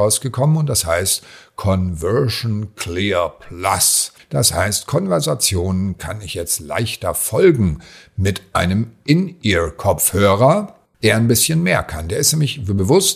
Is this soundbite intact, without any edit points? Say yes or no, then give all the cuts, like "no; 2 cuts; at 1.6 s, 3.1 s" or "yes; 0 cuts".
yes; 0 cuts